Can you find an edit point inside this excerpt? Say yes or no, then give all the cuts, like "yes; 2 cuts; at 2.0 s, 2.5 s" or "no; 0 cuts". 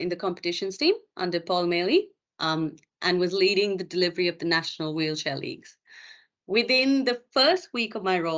no; 0 cuts